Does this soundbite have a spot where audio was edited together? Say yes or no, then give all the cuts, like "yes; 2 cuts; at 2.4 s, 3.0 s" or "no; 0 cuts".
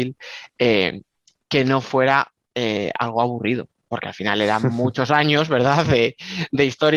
no; 0 cuts